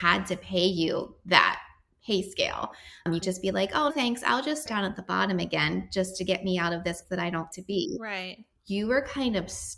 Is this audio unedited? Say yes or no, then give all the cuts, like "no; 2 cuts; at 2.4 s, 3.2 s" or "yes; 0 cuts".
no; 5 cuts; at 3.2 s, 3.9 s, 4.7 s, 7.0 s, 7.5 s